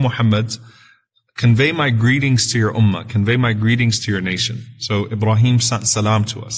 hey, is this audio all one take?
yes; 0 cuts

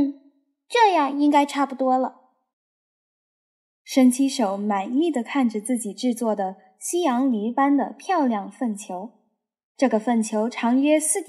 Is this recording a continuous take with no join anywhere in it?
yes; 0 cuts

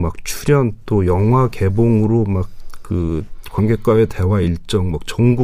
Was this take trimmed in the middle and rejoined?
no; 0 cuts

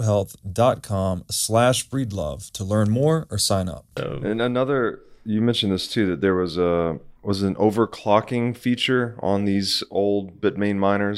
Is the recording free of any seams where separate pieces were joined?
no; 2 cuts; at 3.9 s, 7.2 s

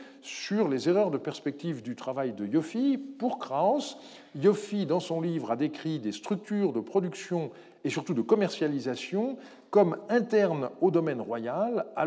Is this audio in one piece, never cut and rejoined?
yes; 0 cuts

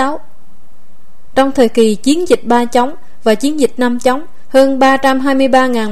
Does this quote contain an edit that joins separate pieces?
no; 0 cuts

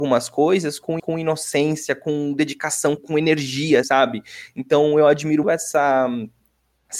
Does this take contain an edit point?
yes; 4 cuts; at 1.0 s, 3.0 s, 3.8 s, 5.4 s

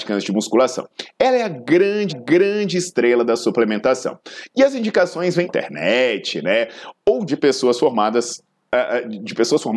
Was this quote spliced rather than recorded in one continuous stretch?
yes; 3 cuts; at 2.1 s, 5.4 s, 7.3 s

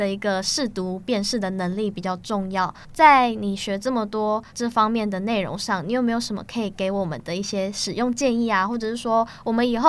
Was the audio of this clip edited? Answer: yes; 1 cut; at 4.5 s

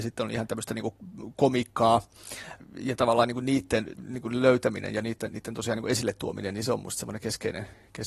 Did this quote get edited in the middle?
no; 0 cuts

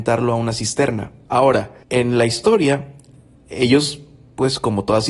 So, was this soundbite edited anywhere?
yes; 1 cut; at 1.8 s

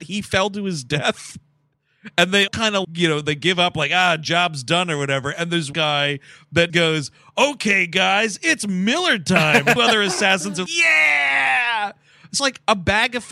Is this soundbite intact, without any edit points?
no; 7 cuts; at 2.5 s, 2.8 s, 5.7 s, 6.7 s, 9.8 s, 10.7 s, 12.4 s

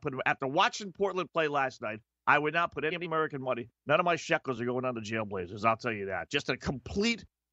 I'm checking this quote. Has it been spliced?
no; 0 cuts

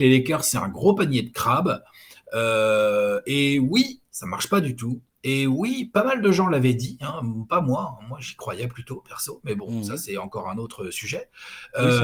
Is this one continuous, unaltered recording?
yes; 0 cuts

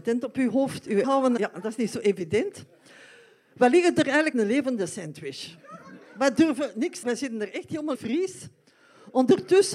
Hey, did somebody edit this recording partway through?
yes; 5 cuts; at 1.0 s, 1.4 s, 4.3 s, 7.0 s, 7.9 s

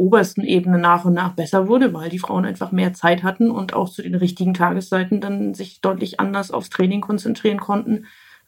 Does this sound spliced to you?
no; 0 cuts

